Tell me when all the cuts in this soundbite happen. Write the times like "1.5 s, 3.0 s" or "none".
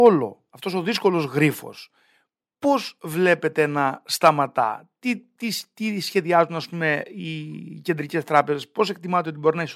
none